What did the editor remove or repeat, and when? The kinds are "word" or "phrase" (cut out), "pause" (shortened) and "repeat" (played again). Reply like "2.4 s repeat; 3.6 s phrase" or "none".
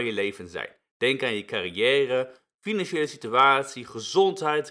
none